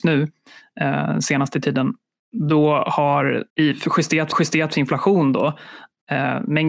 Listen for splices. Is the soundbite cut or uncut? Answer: cut